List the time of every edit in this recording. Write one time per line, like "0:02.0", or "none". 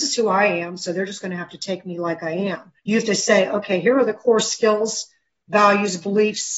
0:02.8